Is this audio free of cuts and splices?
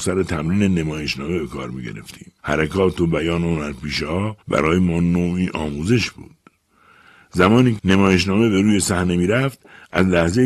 no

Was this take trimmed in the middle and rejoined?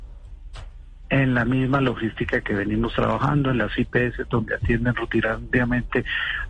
no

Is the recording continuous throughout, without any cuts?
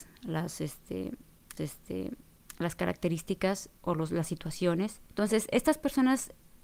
no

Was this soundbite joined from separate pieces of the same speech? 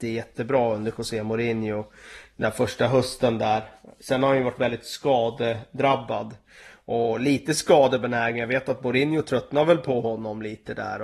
no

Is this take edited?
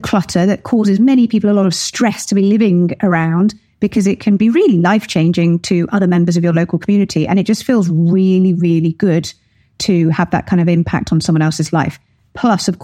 no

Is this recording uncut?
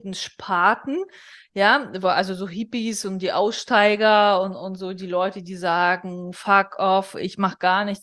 yes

